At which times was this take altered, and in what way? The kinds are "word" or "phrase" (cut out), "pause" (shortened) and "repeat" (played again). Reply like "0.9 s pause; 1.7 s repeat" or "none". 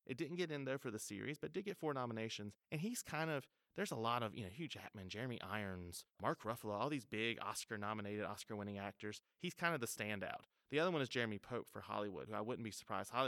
2.6 s pause; 6.1 s pause; 12.3 s word